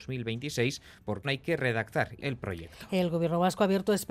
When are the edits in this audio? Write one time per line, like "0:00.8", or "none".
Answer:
0:01.2
0:02.2